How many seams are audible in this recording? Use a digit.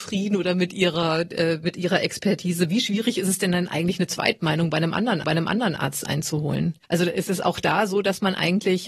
2